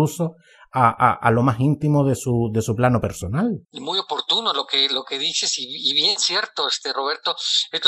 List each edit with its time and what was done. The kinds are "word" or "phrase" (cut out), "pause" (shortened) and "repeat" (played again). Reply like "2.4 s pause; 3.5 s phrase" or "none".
3.6 s pause